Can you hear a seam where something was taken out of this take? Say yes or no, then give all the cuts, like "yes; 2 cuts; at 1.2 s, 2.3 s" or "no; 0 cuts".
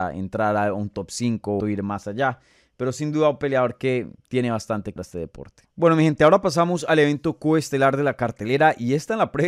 yes; 3 cuts; at 1.6 s, 5.0 s, 5.7 s